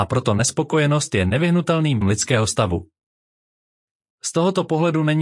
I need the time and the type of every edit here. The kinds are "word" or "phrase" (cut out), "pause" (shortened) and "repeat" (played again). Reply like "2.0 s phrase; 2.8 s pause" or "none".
2.0 s word